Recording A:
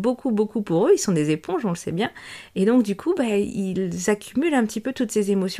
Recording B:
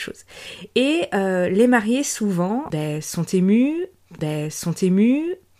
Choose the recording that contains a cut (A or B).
B